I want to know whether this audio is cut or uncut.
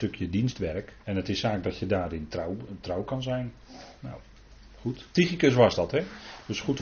cut